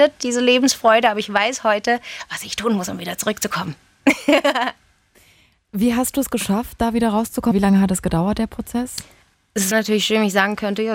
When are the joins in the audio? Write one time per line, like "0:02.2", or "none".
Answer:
0:07.5
0:09.7